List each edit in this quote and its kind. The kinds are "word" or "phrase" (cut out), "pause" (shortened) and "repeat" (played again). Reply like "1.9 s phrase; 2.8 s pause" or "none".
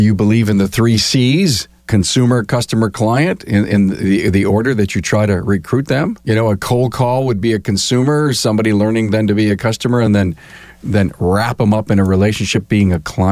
none